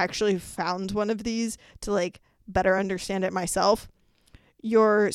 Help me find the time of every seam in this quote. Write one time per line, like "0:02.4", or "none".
none